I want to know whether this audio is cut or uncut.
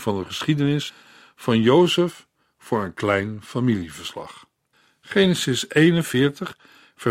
uncut